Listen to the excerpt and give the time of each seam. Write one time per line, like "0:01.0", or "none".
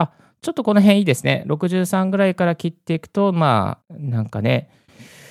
0:03.8